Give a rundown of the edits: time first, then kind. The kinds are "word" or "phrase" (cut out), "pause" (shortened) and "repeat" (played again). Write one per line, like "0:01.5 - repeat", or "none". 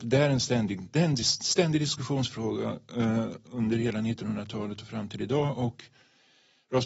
none